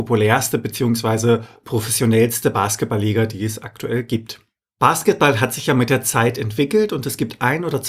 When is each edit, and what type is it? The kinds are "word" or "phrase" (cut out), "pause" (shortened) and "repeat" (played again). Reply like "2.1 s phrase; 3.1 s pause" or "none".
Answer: none